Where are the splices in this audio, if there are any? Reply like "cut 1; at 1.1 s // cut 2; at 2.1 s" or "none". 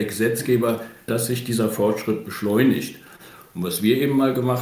cut 1; at 1.1 s